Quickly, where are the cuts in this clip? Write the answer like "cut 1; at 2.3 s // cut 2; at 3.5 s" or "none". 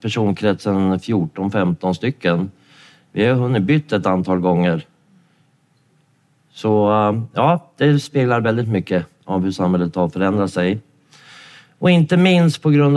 none